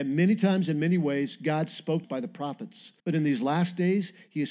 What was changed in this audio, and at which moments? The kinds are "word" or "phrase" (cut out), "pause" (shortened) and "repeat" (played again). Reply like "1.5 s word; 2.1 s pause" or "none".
2.0 s phrase; 3.0 s pause